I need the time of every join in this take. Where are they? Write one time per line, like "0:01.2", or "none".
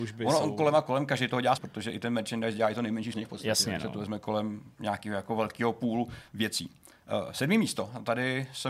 0:01.6
0:03.1